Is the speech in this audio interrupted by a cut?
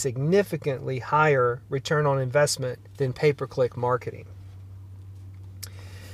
yes; 1 cut; at 2.9 s

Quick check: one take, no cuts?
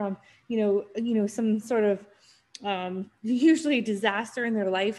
no; 1 cut; at 1.6 s

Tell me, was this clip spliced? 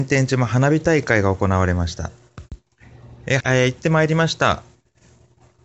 yes; 1 cut; at 3.4 s

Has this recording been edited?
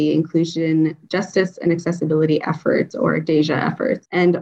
no; 0 cuts

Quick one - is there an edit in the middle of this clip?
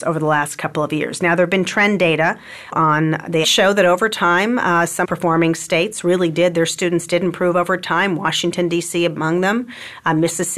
yes; 3 cuts; at 2.7 s, 3.4 s, 5.0 s

